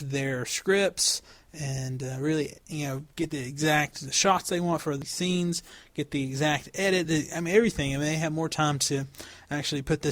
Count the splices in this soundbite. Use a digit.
0